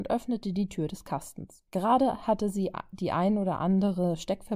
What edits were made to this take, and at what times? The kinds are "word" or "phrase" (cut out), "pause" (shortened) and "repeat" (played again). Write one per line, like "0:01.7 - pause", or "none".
0:01.7 - pause

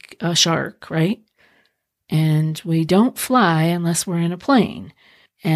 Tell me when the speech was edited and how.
none

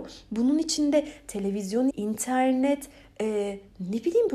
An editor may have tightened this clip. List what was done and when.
0:01.9 - word

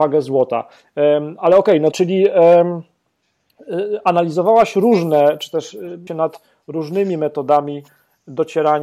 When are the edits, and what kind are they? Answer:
0:01.9 - word
0:06.1 - word

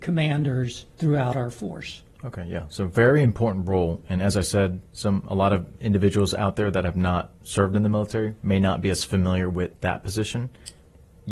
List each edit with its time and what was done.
0:00.9 - pause
0:04.9 - pause
0:09.8 - pause

